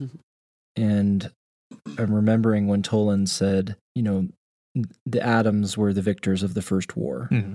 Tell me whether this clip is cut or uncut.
cut